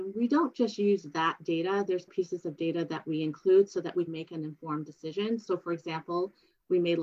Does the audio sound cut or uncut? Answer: cut